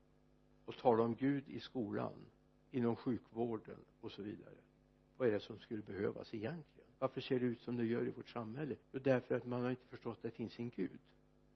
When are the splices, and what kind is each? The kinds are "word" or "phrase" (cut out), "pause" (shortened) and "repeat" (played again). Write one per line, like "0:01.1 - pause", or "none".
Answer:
0:02.5 - pause
0:04.8 - pause
0:07.0 - pause
0:08.8 - pause